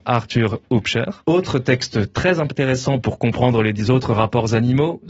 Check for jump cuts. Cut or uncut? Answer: cut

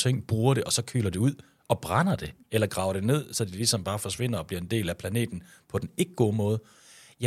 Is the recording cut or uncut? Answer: uncut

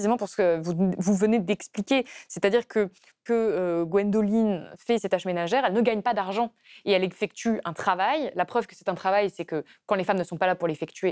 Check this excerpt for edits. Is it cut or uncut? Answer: cut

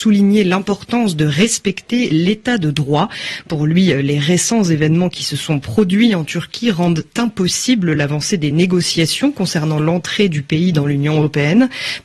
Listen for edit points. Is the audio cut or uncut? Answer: uncut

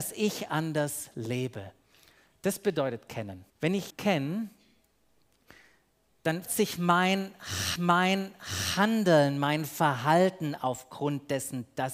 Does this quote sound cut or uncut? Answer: cut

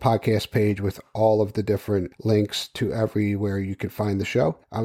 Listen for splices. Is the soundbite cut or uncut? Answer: uncut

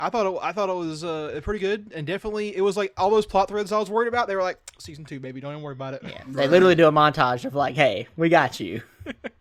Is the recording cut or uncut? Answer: uncut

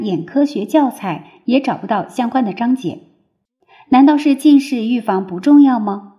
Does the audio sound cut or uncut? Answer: uncut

